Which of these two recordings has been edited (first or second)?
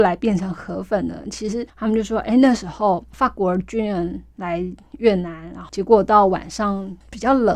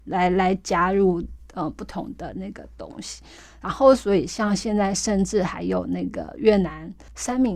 first